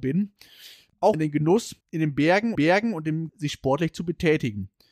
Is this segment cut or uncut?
cut